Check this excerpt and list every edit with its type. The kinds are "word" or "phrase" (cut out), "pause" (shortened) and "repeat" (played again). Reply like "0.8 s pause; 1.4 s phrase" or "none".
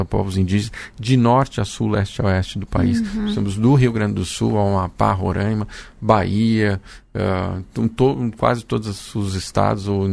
none